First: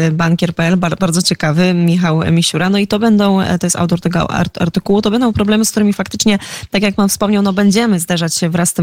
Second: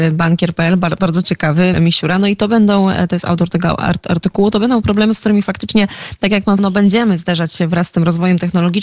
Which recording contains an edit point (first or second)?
second